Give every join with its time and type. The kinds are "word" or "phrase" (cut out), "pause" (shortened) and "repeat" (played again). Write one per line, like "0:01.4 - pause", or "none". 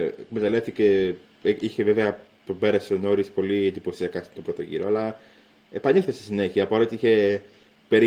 none